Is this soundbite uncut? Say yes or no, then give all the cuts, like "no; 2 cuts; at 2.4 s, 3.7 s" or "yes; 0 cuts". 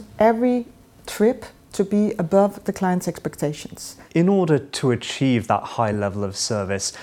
yes; 0 cuts